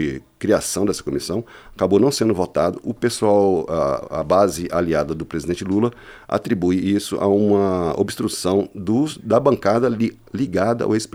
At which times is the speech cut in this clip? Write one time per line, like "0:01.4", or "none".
none